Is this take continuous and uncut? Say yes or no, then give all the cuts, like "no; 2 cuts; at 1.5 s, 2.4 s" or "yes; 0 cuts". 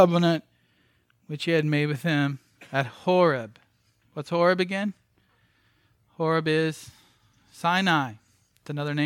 yes; 0 cuts